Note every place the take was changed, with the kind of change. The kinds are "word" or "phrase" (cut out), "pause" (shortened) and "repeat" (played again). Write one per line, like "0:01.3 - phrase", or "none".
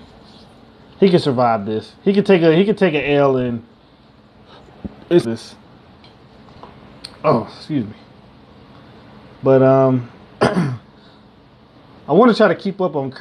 0:05.2 - word